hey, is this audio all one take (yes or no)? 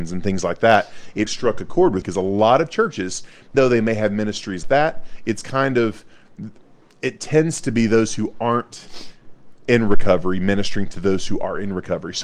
no